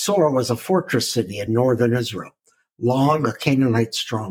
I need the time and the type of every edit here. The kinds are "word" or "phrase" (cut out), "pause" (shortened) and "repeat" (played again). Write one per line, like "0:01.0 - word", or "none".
none